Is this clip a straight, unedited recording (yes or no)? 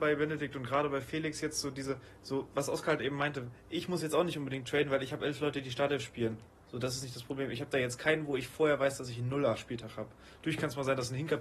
yes